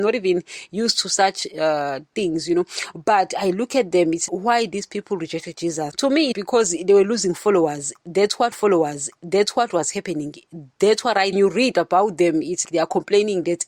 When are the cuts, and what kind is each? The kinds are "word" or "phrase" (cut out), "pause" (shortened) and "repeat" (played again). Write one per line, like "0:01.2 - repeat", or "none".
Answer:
0:04.3 - word
0:05.9 - word
0:06.3 - phrase
0:08.5 - repeat
0:11.3 - phrase
0:12.6 - word